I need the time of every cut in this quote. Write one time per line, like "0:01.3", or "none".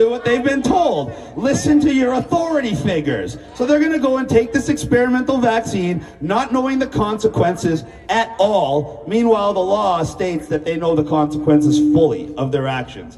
none